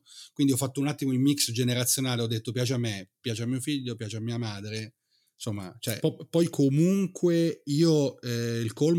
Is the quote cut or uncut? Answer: uncut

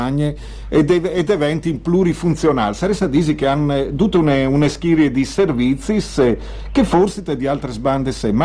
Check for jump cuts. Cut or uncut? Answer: uncut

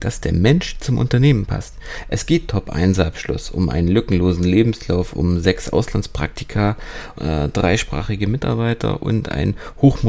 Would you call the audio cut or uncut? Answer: cut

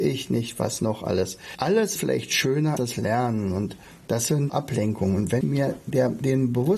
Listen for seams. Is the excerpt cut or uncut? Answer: cut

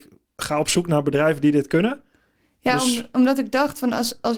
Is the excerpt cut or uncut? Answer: uncut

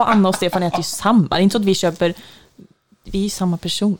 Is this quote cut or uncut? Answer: uncut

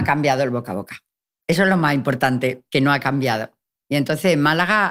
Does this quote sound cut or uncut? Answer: uncut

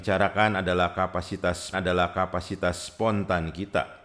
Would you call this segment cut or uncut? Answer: cut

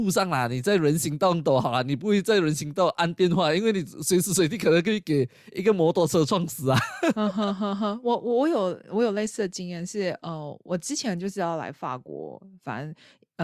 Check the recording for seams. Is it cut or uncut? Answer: uncut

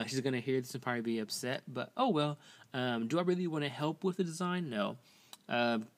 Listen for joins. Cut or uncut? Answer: uncut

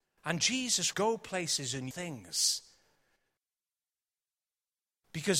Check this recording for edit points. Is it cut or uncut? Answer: cut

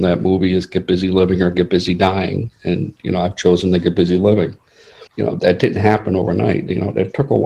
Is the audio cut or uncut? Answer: cut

